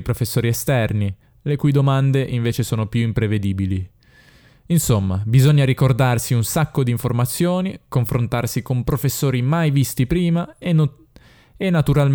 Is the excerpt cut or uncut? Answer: uncut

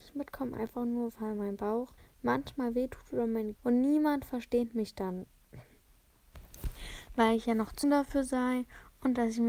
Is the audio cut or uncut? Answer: cut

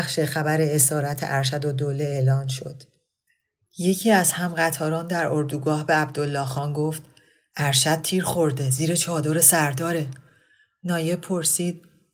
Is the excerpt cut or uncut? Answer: uncut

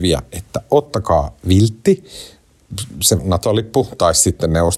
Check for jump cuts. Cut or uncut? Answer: cut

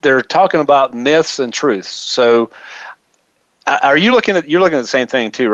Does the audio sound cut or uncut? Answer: uncut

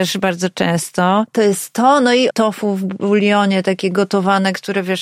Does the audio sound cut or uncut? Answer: cut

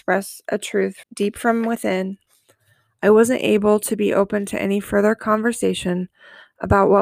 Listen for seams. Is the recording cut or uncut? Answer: cut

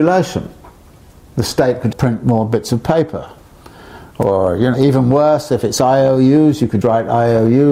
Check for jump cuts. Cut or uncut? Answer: cut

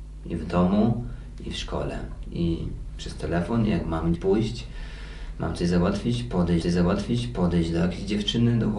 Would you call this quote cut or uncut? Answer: cut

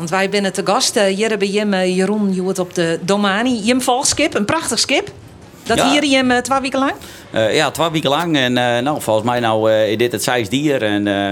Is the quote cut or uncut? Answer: uncut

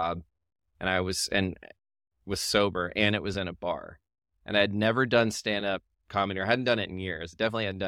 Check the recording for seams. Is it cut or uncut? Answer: uncut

